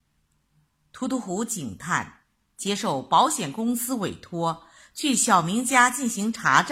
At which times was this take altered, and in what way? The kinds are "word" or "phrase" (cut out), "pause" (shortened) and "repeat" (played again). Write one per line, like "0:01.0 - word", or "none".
none